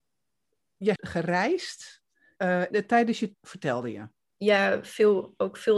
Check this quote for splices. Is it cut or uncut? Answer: cut